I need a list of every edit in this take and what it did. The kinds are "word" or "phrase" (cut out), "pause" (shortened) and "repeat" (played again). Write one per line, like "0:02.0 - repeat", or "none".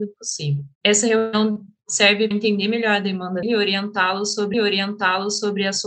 0:02.3 - word
0:03.4 - word
0:04.5 - repeat